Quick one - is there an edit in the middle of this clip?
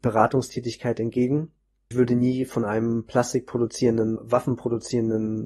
yes; 2 cuts; at 1.9 s, 4.2 s

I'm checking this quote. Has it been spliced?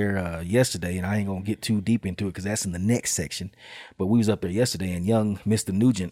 no; 0 cuts

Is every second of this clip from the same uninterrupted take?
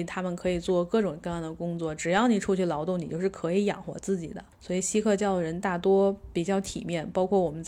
no; 1 cut; at 4.5 s

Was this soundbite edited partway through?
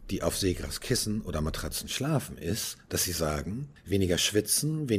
yes; 1 cut; at 3.8 s

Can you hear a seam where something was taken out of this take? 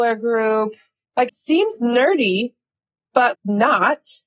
yes; 2 cuts; at 1.3 s, 3.3 s

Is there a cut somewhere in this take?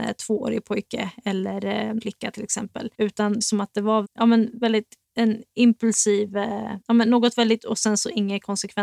yes; 7 cuts; at 2.0 s, 2.9 s, 3.4 s, 4.0 s, 5.0 s, 6.8 s, 7.6 s

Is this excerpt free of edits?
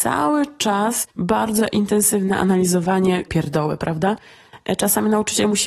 no; 2 cuts; at 1.1 s, 3.3 s

